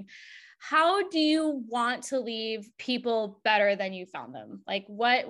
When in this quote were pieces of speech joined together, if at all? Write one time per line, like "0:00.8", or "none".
0:02.7